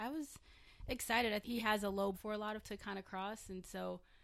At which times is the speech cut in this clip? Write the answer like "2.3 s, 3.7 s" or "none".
1.4 s, 2.1 s, 2.6 s